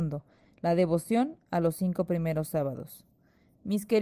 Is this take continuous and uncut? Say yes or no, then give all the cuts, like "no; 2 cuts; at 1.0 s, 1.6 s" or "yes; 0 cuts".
yes; 0 cuts